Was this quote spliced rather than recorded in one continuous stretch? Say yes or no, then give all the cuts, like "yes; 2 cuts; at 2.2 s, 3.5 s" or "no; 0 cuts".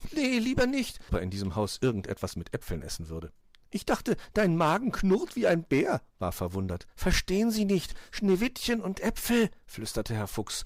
yes; 4 cuts; at 1.1 s, 3.4 s, 6.3 s, 6.9 s